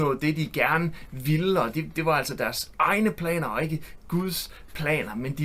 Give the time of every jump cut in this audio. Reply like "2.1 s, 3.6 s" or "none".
none